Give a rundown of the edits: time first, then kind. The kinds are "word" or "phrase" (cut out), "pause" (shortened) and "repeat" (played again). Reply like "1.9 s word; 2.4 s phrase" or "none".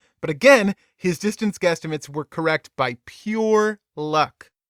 none